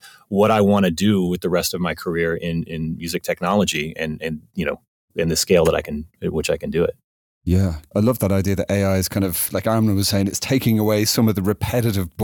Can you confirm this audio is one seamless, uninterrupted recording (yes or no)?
yes